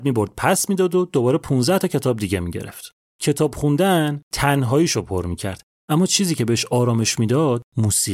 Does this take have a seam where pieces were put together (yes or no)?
no